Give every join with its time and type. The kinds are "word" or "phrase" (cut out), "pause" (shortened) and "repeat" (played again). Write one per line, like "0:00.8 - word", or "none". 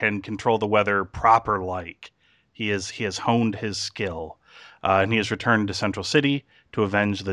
none